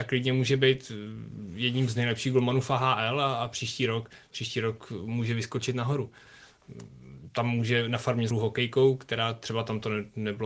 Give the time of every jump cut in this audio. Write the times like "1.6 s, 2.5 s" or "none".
8.3 s